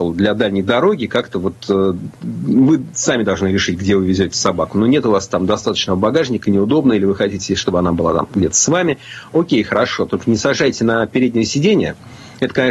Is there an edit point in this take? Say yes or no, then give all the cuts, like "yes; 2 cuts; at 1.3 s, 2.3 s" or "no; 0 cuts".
no; 0 cuts